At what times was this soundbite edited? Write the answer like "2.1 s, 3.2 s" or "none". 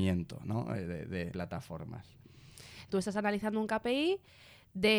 1.3 s, 2.9 s